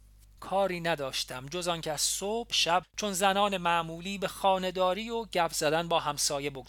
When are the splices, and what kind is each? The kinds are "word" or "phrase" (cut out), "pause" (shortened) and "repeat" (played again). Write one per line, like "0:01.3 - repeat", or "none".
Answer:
0:02.5 - word
0:02.8 - word